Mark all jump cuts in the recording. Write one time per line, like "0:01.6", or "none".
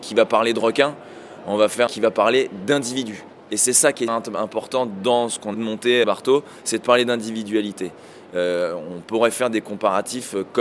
0:01.9
0:04.1
0:05.5
0:06.0